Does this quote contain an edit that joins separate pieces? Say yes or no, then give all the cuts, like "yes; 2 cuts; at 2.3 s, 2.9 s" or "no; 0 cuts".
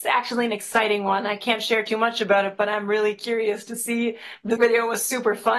yes; 1 cut; at 4.6 s